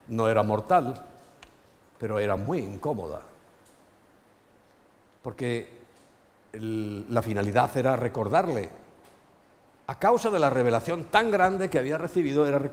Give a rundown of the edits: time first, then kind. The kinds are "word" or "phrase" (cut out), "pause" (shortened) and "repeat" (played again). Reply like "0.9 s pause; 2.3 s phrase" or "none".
none